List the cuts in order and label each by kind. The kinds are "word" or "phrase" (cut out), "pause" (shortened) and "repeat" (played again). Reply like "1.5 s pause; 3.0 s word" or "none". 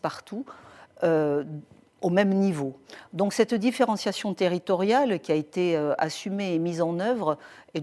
none